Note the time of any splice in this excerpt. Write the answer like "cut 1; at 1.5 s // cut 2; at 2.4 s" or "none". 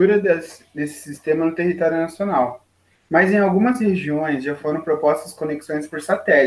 none